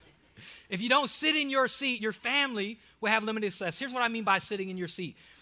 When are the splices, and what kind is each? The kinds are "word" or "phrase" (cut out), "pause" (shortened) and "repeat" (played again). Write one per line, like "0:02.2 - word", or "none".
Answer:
none